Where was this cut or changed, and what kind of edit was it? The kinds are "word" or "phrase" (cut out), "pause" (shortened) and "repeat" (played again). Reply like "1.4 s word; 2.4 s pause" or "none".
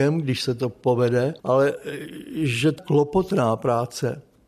1.4 s pause; 2.8 s word